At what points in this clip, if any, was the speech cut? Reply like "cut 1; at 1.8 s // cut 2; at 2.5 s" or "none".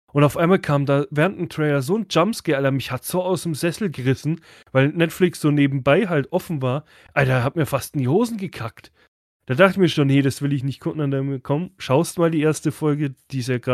none